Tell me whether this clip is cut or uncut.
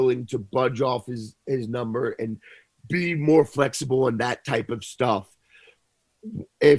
uncut